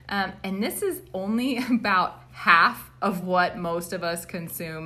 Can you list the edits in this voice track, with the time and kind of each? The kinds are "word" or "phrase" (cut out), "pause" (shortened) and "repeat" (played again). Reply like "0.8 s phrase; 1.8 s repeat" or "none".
none